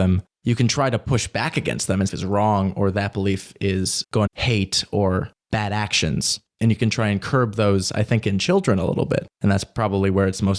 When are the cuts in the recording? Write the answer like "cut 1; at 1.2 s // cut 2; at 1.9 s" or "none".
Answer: cut 1; at 2.1 s // cut 2; at 4.3 s

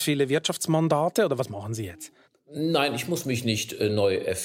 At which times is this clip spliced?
cut 1; at 2.2 s

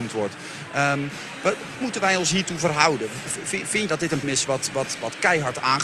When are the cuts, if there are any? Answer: cut 1; at 1.8 s // cut 2; at 3.9 s // cut 3; at 4.2 s

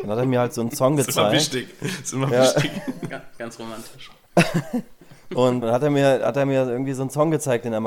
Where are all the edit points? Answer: cut 1; at 5.6 s

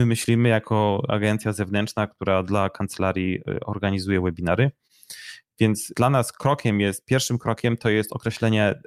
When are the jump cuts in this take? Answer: none

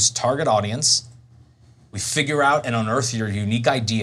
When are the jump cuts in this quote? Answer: none

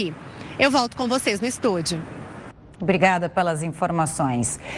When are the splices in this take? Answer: none

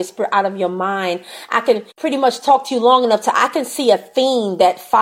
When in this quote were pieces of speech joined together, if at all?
cut 1; at 1.9 s

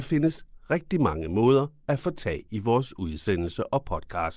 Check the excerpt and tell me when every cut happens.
none

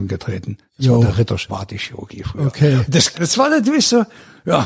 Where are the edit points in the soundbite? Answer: cut 1; at 1.5 s // cut 2; at 3.1 s

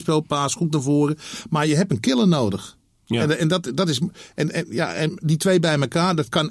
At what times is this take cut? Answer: none

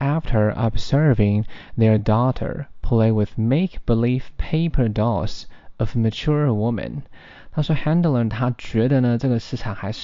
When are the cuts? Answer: none

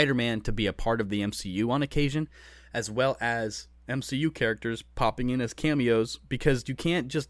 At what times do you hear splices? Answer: none

